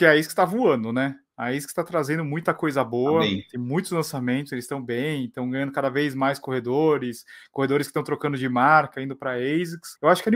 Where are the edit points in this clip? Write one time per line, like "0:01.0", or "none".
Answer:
none